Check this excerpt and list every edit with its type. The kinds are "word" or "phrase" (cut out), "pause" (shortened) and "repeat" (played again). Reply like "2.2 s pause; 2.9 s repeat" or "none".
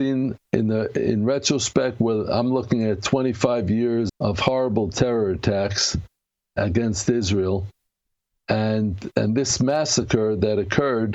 4.1 s word